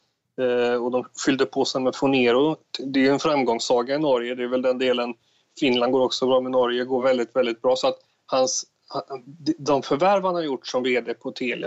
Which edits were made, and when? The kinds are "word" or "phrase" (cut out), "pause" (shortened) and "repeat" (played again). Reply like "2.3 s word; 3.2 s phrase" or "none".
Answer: none